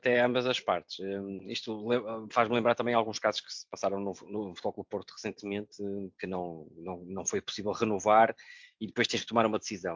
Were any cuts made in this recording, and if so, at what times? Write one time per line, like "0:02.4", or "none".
none